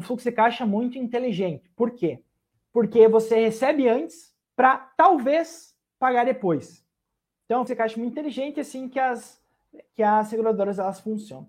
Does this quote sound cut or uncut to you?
cut